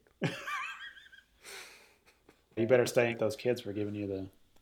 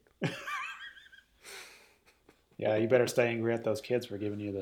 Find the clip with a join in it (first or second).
first